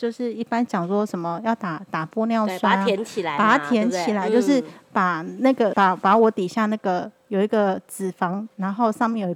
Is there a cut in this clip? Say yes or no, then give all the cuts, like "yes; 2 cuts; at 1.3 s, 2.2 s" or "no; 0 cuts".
yes; 1 cut; at 5.7 s